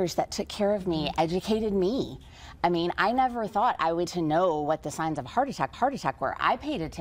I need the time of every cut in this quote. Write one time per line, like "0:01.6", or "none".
0:04.1
0:05.7